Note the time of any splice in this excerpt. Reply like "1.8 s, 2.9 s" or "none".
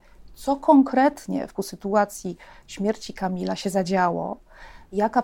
1.6 s

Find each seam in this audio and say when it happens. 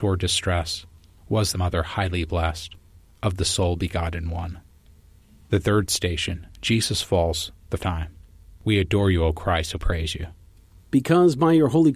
1.5 s, 6.5 s, 7.8 s, 9.7 s

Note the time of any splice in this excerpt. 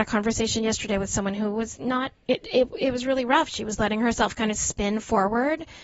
none

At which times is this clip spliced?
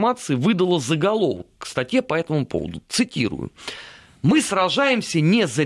none

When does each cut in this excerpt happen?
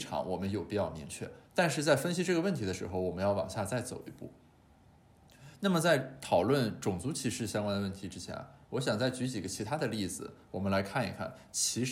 1.4 s

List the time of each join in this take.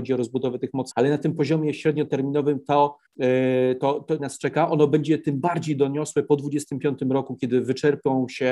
0.9 s, 3.1 s, 4.2 s

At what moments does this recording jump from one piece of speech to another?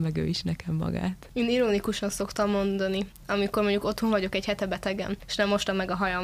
none

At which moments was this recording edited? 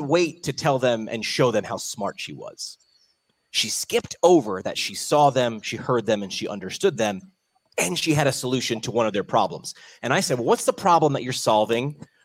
none

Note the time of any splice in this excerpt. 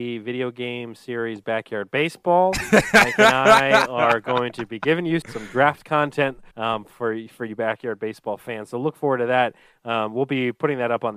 5.2 s, 6.5 s

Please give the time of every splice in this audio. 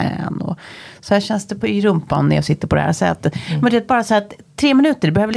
none

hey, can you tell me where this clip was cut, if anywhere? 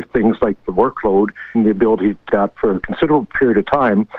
1.5 s, 2.3 s

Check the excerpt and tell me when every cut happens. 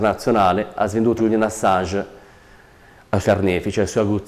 1.2 s, 3.2 s

